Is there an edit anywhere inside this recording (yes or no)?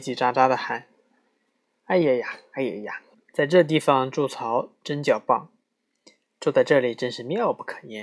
yes